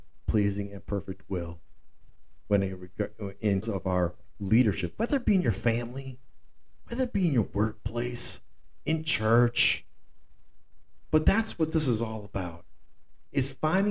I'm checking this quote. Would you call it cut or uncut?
cut